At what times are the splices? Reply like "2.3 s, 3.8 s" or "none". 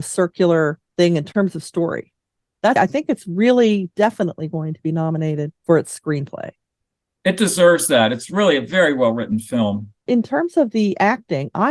2.8 s, 10.1 s